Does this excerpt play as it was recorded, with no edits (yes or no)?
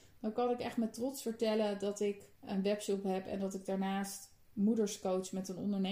no